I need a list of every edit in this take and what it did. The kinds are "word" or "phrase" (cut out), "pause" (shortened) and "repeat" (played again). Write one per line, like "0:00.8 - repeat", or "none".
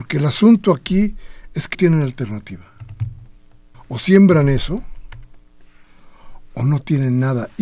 0:01.7 - word
0:03.7 - pause